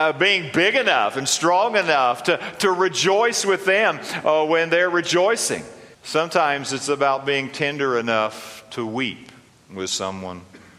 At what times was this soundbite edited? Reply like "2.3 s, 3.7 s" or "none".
5.9 s, 9.5 s